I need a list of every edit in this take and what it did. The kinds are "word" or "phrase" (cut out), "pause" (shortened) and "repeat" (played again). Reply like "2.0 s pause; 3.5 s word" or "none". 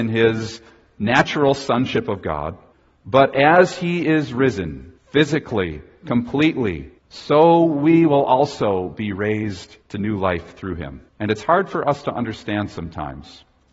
2.7 s pause; 5.0 s pause; 7.0 s pause; 9.8 s pause; 11.1 s pause